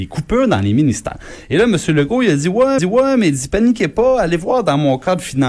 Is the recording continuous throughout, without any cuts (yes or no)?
no